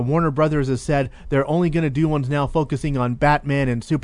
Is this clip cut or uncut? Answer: uncut